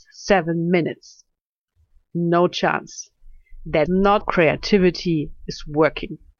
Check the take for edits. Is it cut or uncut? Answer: cut